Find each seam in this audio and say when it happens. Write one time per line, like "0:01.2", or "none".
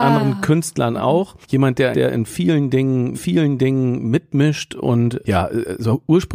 0:01.4
0:01.9
0:03.1
0:05.2